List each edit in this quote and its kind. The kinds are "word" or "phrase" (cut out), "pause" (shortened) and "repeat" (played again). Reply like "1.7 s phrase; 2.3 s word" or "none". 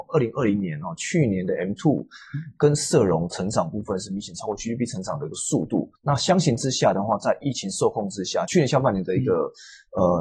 6.0 s pause